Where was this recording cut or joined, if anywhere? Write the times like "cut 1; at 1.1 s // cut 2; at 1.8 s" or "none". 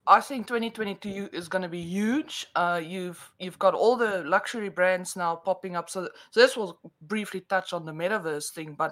none

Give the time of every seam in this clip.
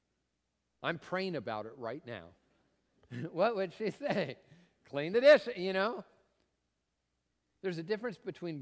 cut 1; at 2.4 s

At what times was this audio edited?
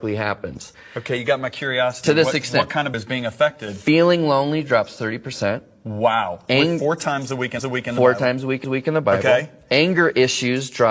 cut 1; at 2.9 s // cut 2; at 7.6 s // cut 3; at 8.6 s

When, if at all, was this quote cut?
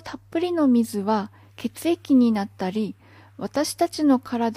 none

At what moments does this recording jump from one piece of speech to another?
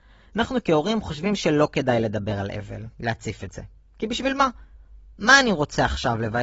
cut 1; at 2.9 s

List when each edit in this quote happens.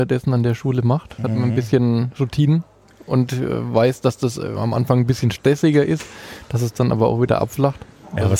none

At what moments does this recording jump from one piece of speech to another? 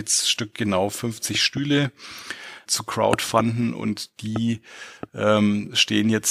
cut 1; at 2.7 s

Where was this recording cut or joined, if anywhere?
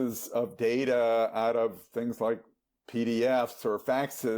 none

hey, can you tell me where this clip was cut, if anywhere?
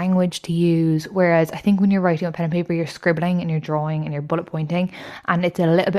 none

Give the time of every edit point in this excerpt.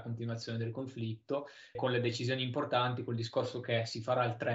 cut 1; at 1.7 s

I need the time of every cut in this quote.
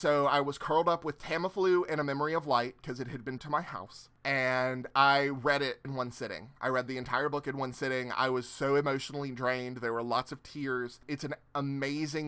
cut 1; at 3.4 s // cut 2; at 5.8 s

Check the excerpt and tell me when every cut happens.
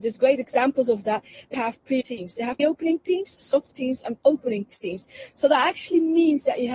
cut 1; at 1.5 s // cut 2; at 2.0 s // cut 3; at 2.6 s // cut 4; at 3.7 s

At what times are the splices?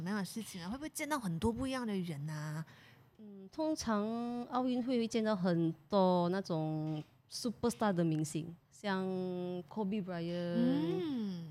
none

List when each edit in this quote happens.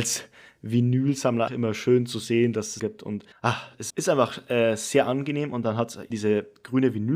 cut 1; at 1.5 s // cut 2; at 2.8 s // cut 3; at 3.3 s // cut 4; at 3.9 s // cut 5; at 6.1 s

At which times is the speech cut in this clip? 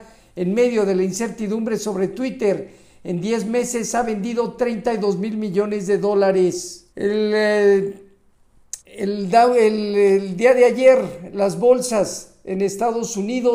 cut 1; at 6.9 s // cut 2; at 8.8 s

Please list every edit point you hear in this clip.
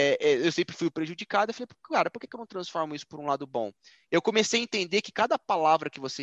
none

